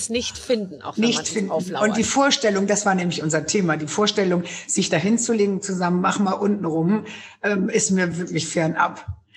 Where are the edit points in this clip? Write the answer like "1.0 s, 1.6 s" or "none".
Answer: none